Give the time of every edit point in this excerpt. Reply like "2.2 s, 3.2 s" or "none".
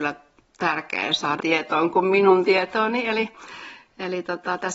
1.4 s